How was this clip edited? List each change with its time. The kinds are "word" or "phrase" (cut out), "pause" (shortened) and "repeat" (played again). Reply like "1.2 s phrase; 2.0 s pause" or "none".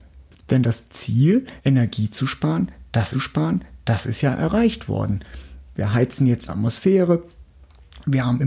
1.6 s pause; 3.1 s repeat; 6.5 s phrase